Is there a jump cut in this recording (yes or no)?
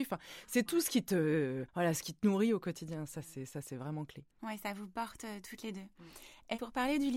yes